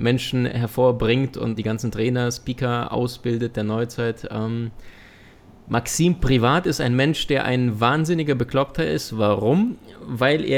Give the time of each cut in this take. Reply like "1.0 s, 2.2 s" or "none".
1.6 s